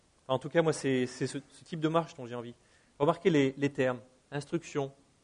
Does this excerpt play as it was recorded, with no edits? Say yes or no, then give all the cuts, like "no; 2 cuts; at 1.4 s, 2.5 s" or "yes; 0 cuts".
yes; 0 cuts